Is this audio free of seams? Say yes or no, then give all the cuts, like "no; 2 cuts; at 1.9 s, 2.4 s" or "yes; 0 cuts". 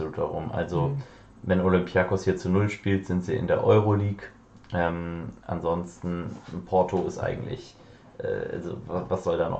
yes; 0 cuts